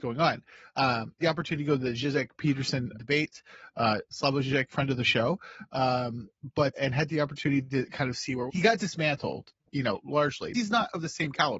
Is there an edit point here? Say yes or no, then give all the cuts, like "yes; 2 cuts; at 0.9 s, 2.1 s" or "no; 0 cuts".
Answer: yes; 7 cuts; at 1.2 s, 2.9 s, 4.1 s, 4.7 s, 6.7 s, 8.5 s, 10.5 s